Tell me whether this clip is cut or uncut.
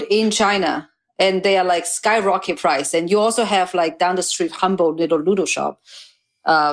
uncut